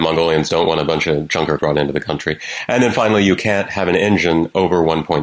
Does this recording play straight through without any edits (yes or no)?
no